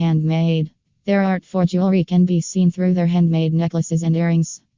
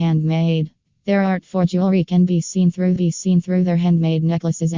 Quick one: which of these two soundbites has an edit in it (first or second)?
second